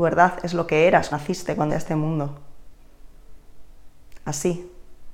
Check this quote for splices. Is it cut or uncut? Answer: cut